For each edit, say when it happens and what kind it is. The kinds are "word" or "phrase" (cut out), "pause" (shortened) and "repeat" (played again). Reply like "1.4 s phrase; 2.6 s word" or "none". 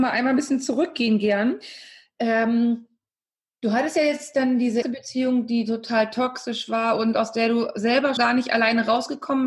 4.8 s word; 8.2 s word